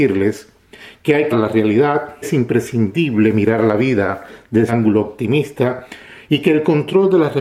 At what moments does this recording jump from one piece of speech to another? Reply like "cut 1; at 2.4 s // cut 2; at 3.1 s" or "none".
cut 1; at 1.3 s // cut 2; at 2.2 s // cut 3; at 4.7 s

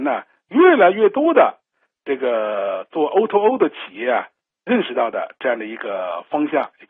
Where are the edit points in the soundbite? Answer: none

